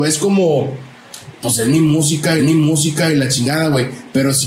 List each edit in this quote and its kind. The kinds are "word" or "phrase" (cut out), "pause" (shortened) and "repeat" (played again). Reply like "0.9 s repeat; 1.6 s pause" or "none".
2.4 s repeat